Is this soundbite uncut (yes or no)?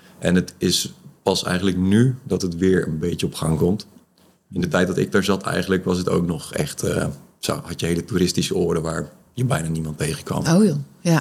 yes